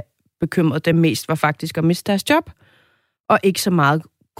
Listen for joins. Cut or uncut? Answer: uncut